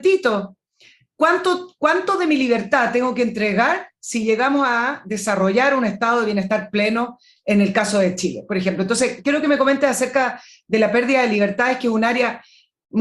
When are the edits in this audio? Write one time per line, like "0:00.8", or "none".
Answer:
none